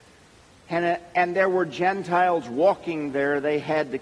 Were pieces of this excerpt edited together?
no; 0 cuts

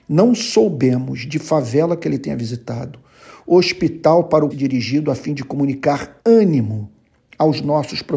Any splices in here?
yes; 2 cuts; at 4.5 s, 6.2 s

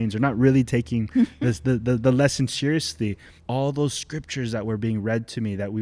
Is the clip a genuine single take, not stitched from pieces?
no; 1 cut; at 3.4 s

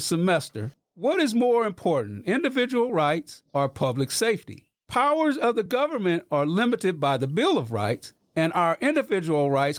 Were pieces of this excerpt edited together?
no; 0 cuts

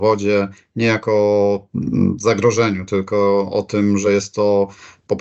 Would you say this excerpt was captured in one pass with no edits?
yes; 0 cuts

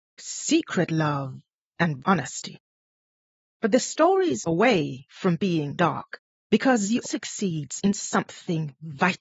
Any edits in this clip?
yes; 4 cuts; at 2.0 s, 4.5 s, 5.8 s, 7.0 s

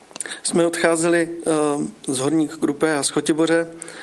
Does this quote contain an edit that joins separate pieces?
no; 0 cuts

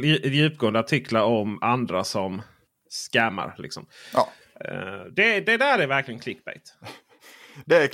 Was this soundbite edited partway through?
no; 0 cuts

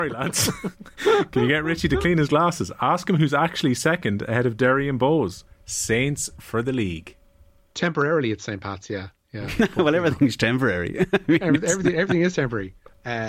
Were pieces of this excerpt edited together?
no; 0 cuts

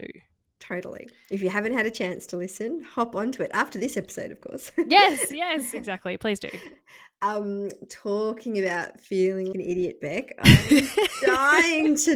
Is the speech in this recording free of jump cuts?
no; 1 cut; at 9.5 s

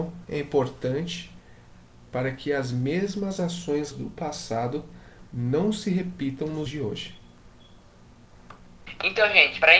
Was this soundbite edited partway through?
yes; 2 cuts; at 3.9 s, 6.7 s

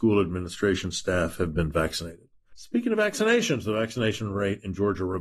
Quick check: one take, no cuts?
yes; 0 cuts

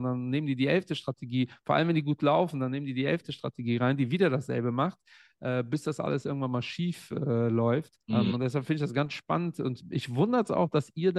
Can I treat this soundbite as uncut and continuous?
no; 1 cut; at 8.0 s

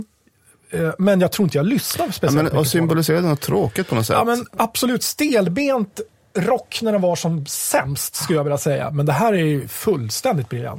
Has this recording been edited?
no; 0 cuts

